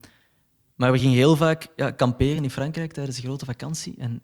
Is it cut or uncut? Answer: uncut